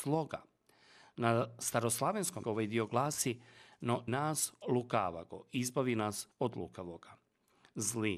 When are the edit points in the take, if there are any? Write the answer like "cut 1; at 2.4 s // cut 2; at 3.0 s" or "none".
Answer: cut 1; at 2.4 s // cut 2; at 4.1 s // cut 3; at 4.6 s // cut 4; at 6.3 s